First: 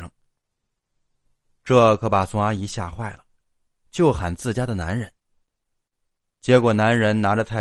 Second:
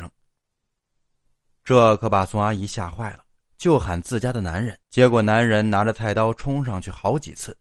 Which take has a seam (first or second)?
second